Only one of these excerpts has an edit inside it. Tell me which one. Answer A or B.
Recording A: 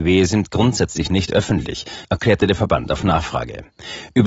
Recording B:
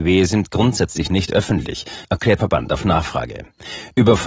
B